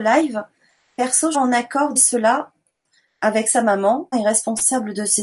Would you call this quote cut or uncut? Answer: cut